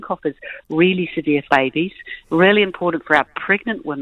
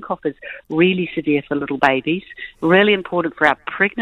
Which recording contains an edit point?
first; 1 cut; at 1.5 s

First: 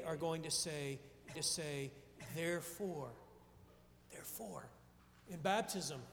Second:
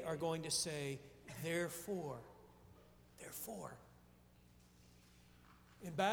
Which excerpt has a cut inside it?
first; 2 cuts; at 1.3 s, 5.0 s

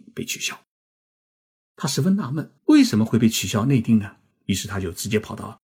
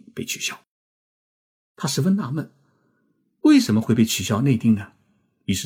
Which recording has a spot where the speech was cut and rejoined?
first; 2 cuts; at 2.6 s, 4.3 s

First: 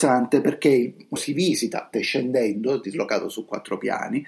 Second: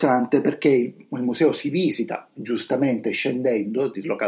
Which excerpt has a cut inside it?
first; 2 cuts; at 1.2 s, 1.9 s

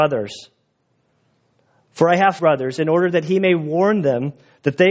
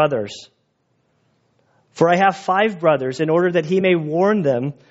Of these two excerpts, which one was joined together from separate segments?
first; 1 cut; at 2.4 s

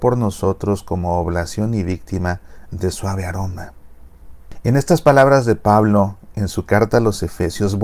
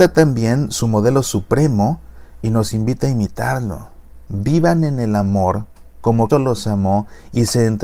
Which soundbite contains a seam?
second; 1 cut; at 6.3 s

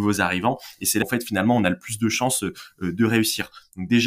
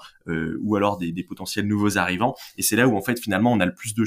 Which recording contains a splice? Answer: first; 1 cut; at 1.0 s

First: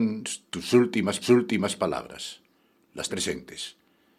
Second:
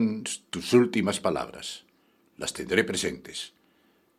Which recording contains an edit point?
first; 2 cuts; at 1.2 s, 3.1 s

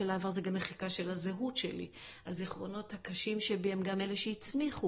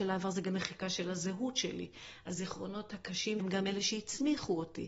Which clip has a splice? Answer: second; 1 cut; at 3.4 s

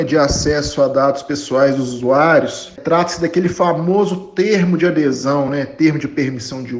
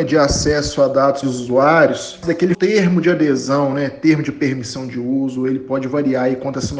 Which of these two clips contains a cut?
second; 3 cuts; at 1.2 s, 2.2 s, 2.5 s

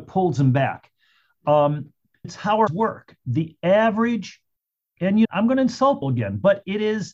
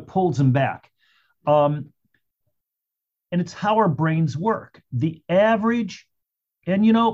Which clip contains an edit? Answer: first; 4 cuts; at 2.2 s, 2.7 s, 5.2 s, 6.0 s

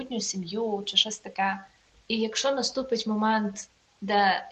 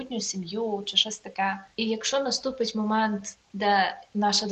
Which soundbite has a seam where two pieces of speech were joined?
second; 2 cuts; at 1.7 s, 3.4 s

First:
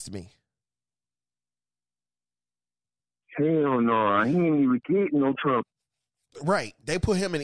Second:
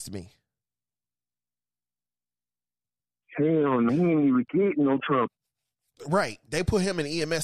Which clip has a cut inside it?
second; 1 cut; at 3.9 s

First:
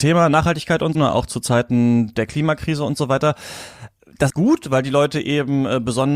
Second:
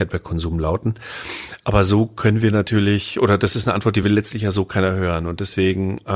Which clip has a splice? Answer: first; 2 cuts; at 0.9 s, 4.3 s

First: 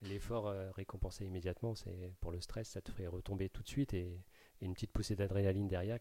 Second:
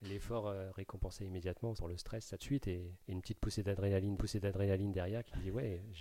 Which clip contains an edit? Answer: second; 4 cuts; at 1.8 s, 2.4 s, 3.0 s, 4.2 s

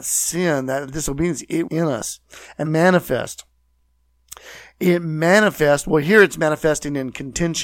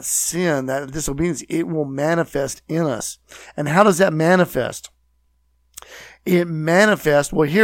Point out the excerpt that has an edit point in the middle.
first; 2 cuts; at 1.7 s, 2.6 s

